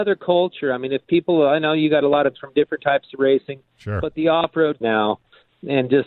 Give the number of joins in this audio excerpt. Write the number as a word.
two